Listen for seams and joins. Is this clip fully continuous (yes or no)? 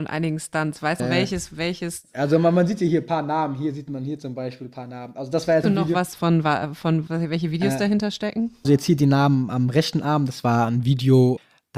no